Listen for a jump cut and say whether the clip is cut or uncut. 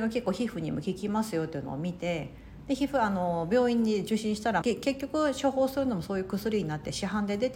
cut